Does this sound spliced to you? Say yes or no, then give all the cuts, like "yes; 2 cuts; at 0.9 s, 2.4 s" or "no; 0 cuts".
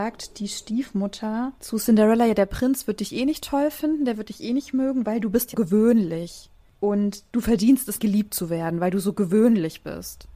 yes; 2 cuts; at 5.5 s, 8.0 s